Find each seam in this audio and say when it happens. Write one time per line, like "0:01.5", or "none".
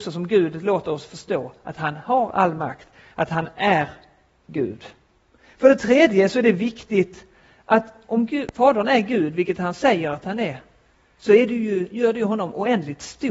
none